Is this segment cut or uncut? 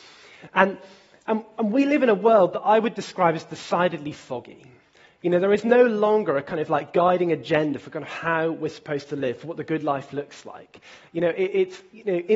uncut